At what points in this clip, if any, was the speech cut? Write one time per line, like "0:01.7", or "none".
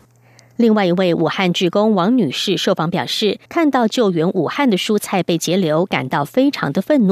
0:03.5